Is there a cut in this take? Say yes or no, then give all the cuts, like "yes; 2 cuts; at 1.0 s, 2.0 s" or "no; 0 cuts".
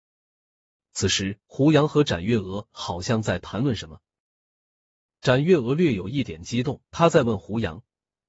yes; 2 cuts; at 1.4 s, 6.8 s